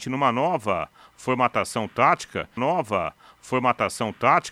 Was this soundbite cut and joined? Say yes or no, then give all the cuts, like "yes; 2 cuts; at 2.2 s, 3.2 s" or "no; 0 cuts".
yes; 1 cut; at 2.6 s